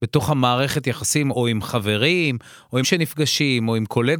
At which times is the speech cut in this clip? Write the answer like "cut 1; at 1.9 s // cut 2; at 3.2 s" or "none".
cut 1; at 1.3 s // cut 2; at 2.8 s